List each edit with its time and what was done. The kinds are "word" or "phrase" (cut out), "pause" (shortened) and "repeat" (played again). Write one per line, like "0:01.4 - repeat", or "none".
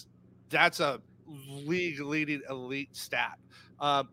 none